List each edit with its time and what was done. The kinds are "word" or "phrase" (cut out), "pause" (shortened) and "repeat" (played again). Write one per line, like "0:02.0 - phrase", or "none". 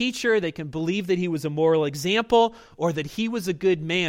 none